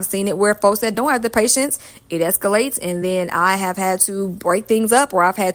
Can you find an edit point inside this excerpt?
no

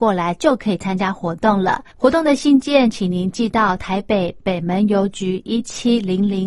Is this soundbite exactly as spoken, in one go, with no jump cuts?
no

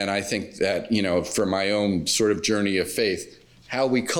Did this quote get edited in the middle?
no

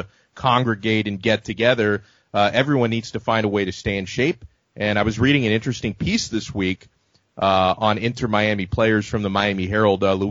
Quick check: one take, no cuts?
yes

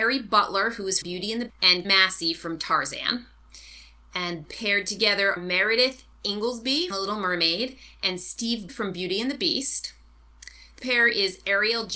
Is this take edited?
yes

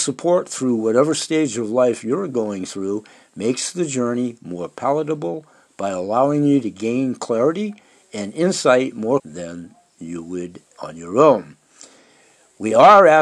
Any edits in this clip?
yes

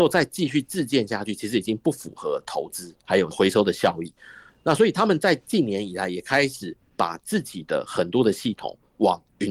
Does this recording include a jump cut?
no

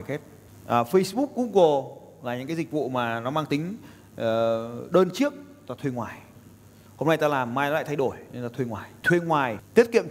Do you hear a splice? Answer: no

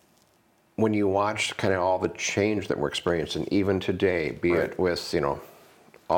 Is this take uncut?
yes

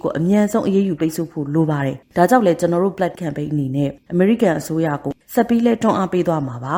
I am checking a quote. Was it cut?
yes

